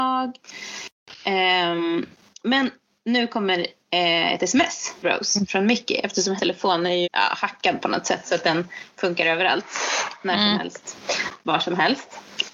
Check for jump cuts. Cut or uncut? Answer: cut